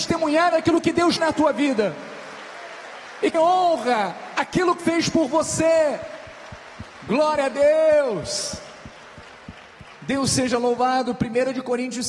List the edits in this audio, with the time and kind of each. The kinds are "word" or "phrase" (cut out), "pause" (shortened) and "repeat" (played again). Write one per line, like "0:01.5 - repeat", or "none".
0:01.2 - word
0:03.3 - word
0:04.8 - word